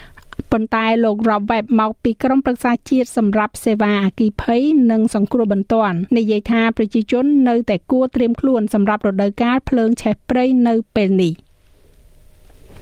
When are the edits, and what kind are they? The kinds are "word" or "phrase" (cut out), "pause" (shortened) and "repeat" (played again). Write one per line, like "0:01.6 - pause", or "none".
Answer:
0:06.1 - pause